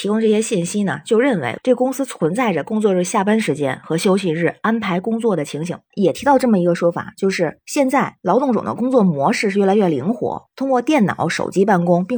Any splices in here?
no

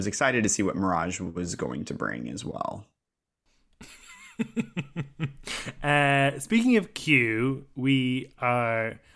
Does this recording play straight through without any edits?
yes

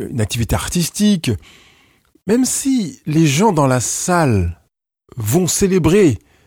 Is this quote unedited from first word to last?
yes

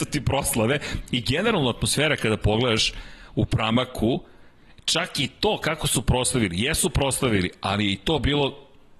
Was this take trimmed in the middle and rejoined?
no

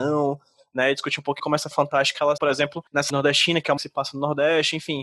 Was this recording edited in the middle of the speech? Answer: yes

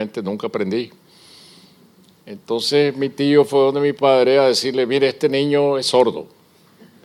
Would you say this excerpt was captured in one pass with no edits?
yes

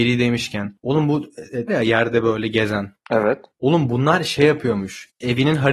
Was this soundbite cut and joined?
yes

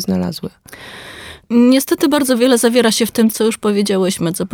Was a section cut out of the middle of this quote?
yes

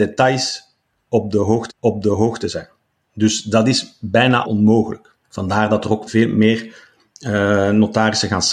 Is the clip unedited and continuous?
no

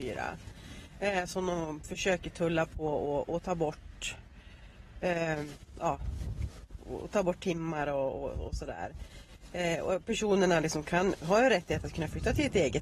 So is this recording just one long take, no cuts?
yes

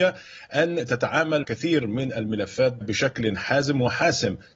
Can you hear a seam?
yes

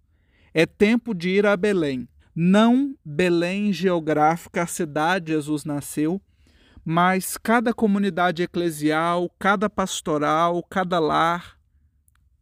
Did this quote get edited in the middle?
yes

